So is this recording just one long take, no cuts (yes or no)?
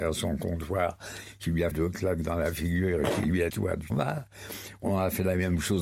no